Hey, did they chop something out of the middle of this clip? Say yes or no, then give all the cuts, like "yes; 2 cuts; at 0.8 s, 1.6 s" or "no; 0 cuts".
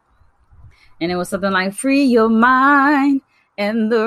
no; 0 cuts